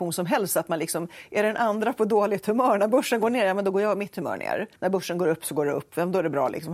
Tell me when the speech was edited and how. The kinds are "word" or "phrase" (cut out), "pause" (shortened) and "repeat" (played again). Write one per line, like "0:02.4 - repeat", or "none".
0:04.8 - pause